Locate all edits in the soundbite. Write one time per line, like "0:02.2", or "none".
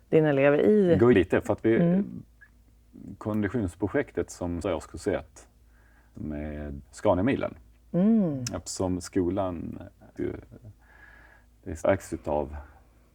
0:01.1
0:04.6
0:06.1
0:06.8
0:10.2
0:11.8